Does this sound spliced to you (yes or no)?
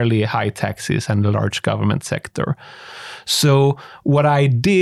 no